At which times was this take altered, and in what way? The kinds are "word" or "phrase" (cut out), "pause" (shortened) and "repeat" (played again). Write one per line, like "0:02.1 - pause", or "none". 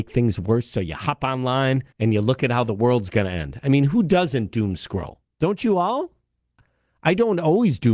0:01.9 - pause